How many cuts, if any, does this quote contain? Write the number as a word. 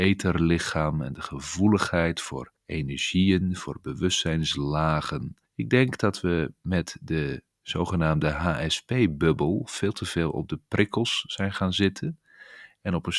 two